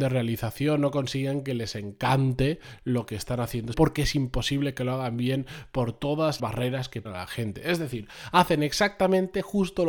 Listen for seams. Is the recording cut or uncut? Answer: cut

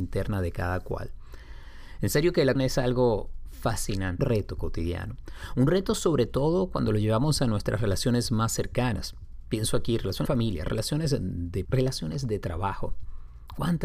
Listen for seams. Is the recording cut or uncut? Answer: cut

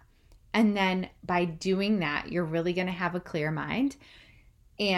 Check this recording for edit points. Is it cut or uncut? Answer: uncut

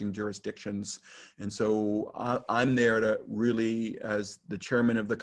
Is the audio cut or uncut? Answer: uncut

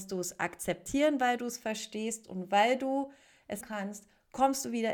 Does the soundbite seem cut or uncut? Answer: cut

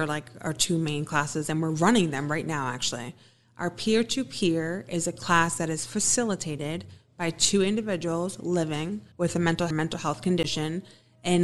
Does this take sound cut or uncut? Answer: cut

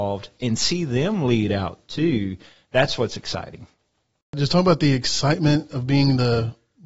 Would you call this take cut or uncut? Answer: uncut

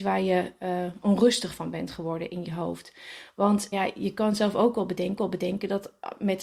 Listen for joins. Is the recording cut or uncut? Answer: cut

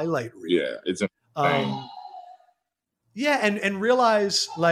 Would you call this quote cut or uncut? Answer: uncut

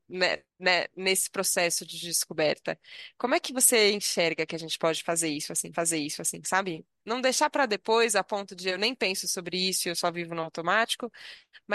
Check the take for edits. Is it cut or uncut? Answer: cut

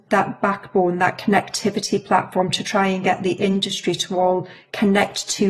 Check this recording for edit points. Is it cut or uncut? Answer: uncut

